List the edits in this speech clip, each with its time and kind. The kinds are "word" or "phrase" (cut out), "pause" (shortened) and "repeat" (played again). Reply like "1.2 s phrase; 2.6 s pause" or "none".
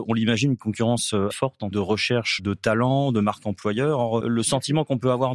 1.3 s word; 1.7 s word; 2.4 s word; 4.2 s word